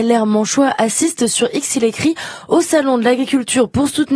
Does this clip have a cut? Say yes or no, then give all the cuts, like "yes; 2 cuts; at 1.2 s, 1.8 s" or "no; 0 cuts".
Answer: no; 0 cuts